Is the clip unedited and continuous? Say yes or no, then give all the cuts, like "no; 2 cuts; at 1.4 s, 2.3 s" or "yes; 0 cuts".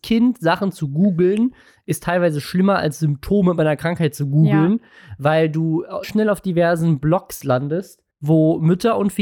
no; 2 cuts; at 6.0 s, 8.1 s